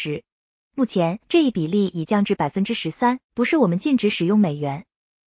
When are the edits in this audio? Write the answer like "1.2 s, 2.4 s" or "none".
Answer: 1.2 s, 3.2 s